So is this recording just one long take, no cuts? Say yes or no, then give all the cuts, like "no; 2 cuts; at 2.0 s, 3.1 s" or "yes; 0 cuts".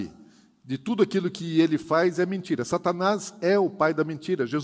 yes; 0 cuts